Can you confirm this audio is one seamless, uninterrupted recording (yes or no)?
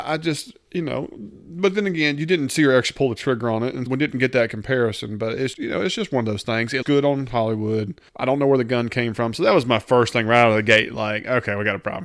no